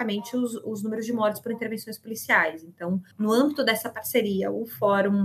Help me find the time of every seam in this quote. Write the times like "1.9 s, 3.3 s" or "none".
none